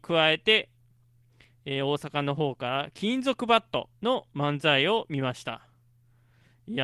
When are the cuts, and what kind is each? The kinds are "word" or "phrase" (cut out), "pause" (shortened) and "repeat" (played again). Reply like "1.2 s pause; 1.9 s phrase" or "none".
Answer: 3.9 s pause